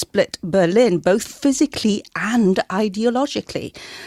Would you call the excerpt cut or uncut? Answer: uncut